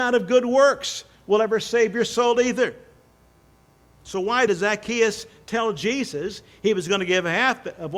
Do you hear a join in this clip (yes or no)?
yes